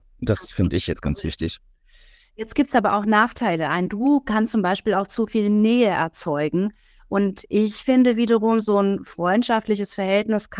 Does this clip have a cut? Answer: no; 0 cuts

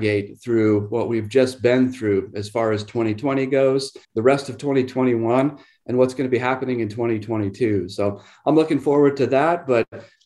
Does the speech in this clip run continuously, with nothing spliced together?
no; 1 cut; at 4.0 s

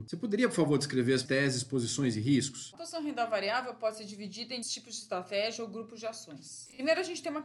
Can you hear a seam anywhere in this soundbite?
yes; 3 cuts; at 1.3 s, 2.8 s, 4.6 s

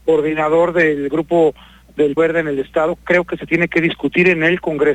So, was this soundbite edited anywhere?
yes; 1 cut; at 2.2 s

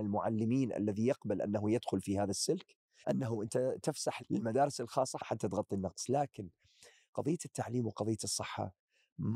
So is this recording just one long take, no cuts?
no; 3 cuts; at 3.0 s, 4.2 s, 5.2 s

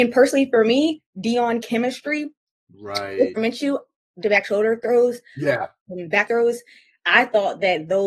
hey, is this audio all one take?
no; 4 cuts; at 1.6 s, 3.4 s, 4.2 s, 6.3 s

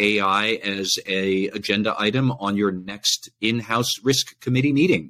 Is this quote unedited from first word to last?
yes; 0 cuts

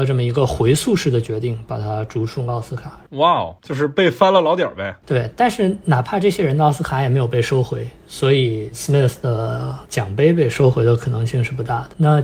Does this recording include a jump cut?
no; 0 cuts

